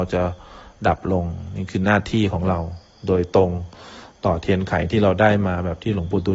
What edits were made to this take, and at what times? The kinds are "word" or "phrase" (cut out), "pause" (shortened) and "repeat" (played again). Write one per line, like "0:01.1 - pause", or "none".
none